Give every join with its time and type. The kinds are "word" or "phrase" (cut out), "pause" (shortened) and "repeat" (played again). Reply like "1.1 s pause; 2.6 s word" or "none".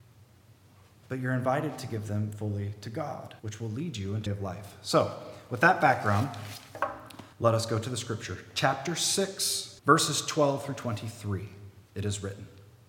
3.4 s pause; 4.3 s phrase; 7.3 s pause; 9.8 s pause; 11.8 s pause